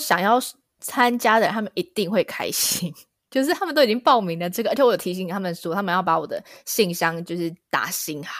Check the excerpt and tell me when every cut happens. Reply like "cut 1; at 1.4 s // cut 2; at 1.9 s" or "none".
none